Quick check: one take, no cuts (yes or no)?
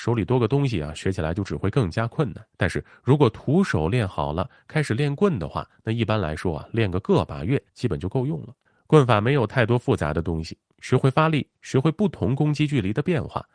no